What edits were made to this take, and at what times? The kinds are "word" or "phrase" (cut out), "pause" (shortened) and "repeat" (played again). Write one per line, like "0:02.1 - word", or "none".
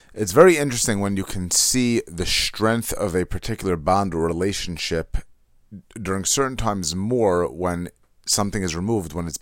none

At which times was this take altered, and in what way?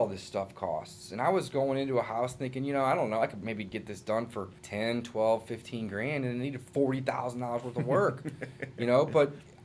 0:04.6 - pause

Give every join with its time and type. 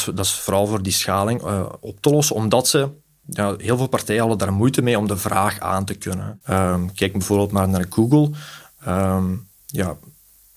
none

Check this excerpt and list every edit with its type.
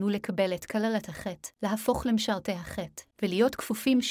0:01.5 - pause
0:03.1 - pause

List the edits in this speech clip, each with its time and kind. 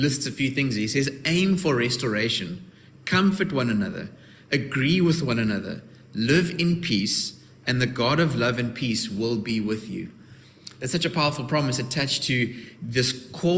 none

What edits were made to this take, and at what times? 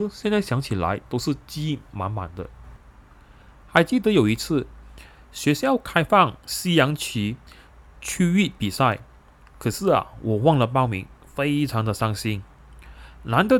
none

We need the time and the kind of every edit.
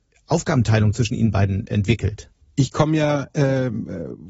0:02.4 - pause

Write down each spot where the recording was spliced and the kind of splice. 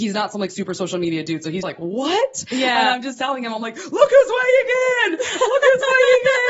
0:01.6 - word

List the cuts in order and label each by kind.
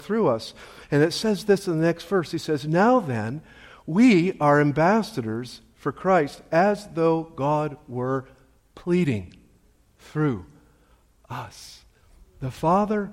none

